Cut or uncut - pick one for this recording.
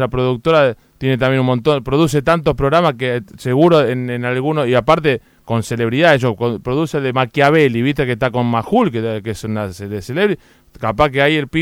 uncut